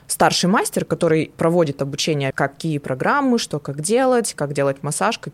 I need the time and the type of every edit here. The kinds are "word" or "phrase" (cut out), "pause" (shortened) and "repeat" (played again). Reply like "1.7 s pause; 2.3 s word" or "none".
2.3 s word